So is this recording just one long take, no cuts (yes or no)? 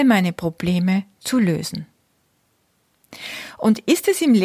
yes